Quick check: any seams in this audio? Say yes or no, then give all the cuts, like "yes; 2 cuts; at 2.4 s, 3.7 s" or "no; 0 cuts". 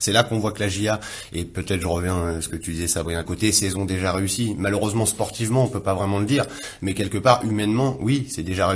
yes; 1 cut; at 3.2 s